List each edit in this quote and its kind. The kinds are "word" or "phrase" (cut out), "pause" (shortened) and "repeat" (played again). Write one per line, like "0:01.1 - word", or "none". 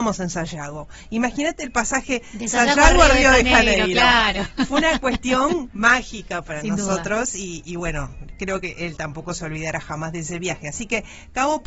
none

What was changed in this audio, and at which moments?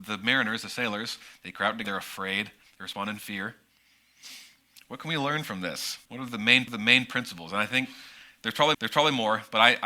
0:01.8 - word
0:06.0 - pause
0:06.7 - repeat
0:08.7 - repeat

